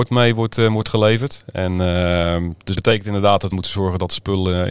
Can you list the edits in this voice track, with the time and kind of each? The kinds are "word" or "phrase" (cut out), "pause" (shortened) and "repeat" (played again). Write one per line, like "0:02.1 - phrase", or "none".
0:02.7 - word
0:03.5 - word